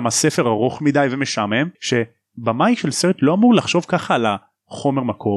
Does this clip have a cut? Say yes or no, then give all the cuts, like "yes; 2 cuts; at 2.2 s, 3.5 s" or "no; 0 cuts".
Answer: yes; 1 cut; at 1.7 s